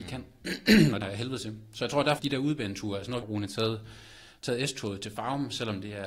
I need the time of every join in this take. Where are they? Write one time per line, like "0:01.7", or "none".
0:01.0
0:02.2
0:03.2